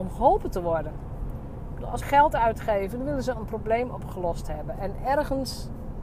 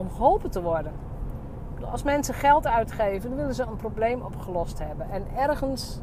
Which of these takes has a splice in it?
first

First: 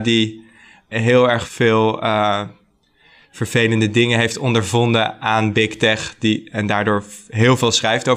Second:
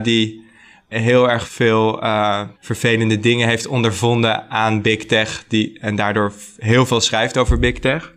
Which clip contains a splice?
second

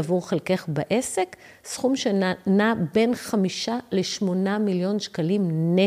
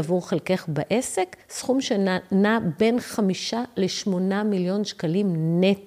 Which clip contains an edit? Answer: second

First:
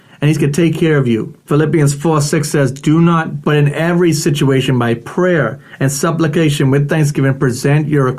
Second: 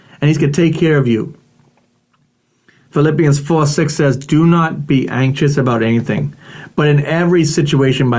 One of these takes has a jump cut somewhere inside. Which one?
first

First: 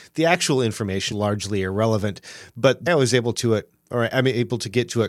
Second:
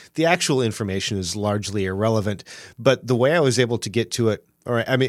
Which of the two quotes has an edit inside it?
first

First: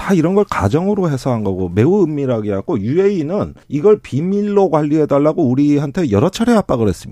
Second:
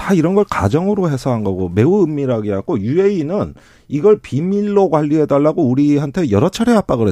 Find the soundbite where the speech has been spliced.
first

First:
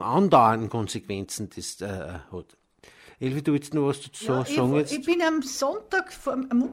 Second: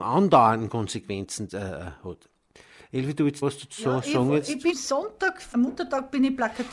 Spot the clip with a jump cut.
second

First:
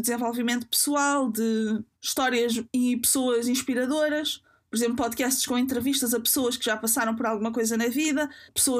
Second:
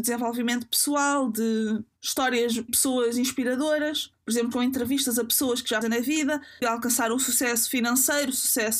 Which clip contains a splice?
second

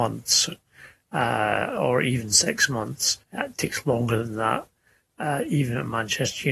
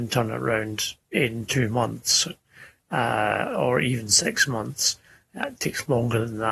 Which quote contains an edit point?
first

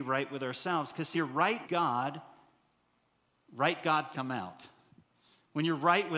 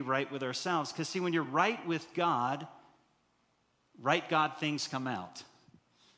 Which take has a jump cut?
first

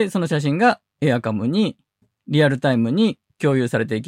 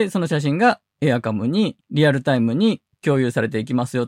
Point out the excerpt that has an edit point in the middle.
second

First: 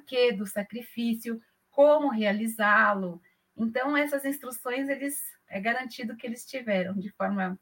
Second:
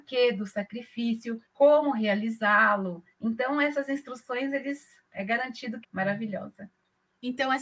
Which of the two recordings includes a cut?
second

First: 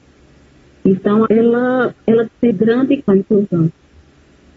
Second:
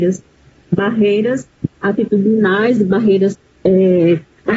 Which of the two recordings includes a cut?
first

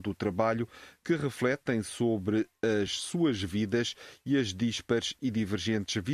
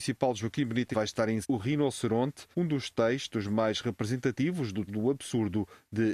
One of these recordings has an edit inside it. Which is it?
second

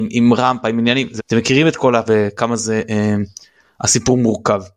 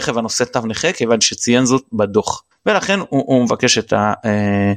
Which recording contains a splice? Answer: first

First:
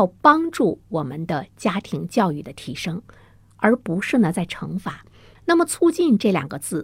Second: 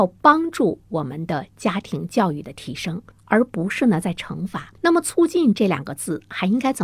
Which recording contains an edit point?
second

